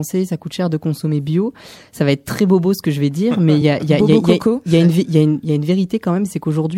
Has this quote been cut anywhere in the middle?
no; 0 cuts

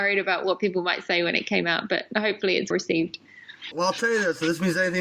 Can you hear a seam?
yes; 2 cuts; at 2.7 s, 3.7 s

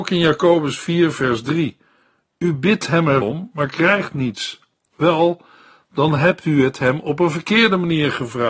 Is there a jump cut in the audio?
yes; 1 cut; at 3.2 s

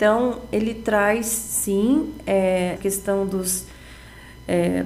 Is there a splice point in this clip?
yes; 1 cut; at 2.8 s

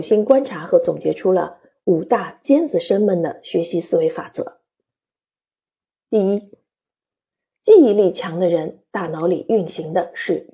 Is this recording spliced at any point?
no; 0 cuts

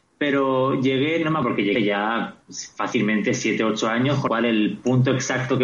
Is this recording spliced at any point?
yes; 3 cuts; at 1.4 s, 1.8 s, 4.3 s

